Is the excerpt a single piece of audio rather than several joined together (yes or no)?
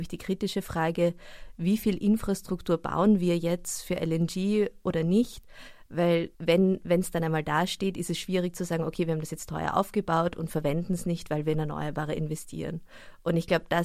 no